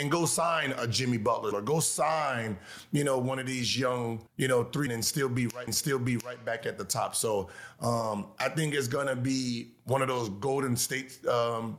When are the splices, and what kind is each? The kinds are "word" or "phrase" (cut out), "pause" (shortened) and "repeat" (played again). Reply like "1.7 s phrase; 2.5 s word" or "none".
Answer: 1.5 s word; 4.3 s pause; 4.9 s word; 5.7 s repeat